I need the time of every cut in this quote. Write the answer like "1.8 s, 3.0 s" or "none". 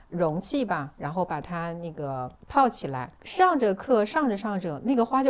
2.4 s, 3.2 s